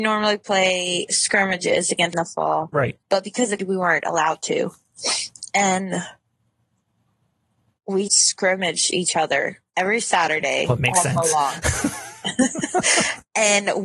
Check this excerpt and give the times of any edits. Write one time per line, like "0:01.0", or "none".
0:02.1
0:03.0
0:03.6
0:08.1
0:09.7
0:10.8